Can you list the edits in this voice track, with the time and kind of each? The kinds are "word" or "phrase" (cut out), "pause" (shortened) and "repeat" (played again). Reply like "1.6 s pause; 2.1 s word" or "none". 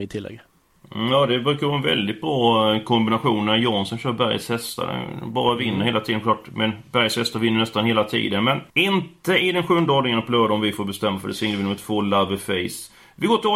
8.7 s pause